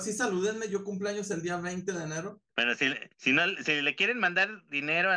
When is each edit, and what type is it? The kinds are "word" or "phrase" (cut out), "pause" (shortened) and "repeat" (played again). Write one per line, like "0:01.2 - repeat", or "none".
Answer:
0:02.5 - pause
0:03.1 - pause